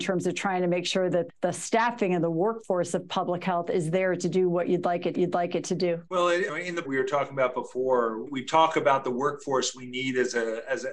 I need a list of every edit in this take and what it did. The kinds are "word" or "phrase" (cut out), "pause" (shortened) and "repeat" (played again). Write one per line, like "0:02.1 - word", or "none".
0:01.3 - word
0:05.1 - repeat
0:06.1 - pause
0:06.8 - phrase
0:08.3 - word

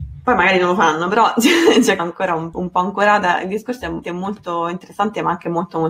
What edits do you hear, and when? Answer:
0:02.0 - phrase
0:02.5 - word
0:04.0 - word

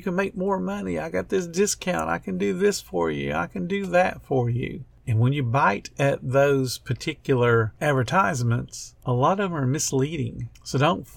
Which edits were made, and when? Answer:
none

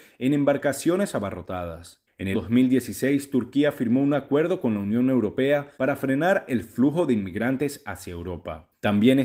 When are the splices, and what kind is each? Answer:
0:02.3 - word
0:05.7 - pause

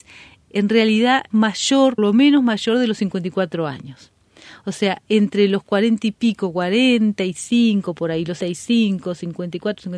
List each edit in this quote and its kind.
0:01.3 - word
0:02.0 - word
0:08.4 - word

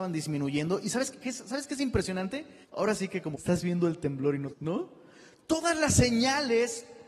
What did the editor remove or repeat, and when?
0:01.1 - word
0:02.6 - pause
0:03.3 - phrase
0:04.5 - word

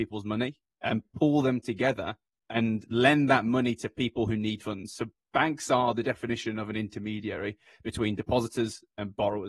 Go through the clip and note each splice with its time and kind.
none

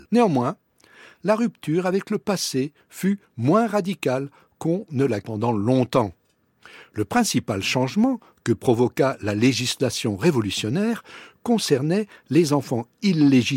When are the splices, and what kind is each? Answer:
0:05.2 - word

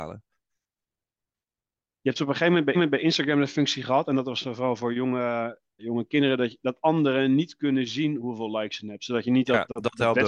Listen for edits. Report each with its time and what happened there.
0:02.7 - repeat
0:05.8 - word

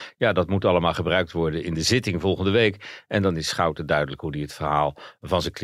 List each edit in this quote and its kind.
none

